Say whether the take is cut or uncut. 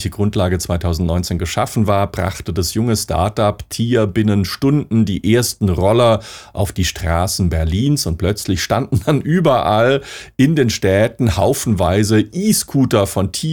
uncut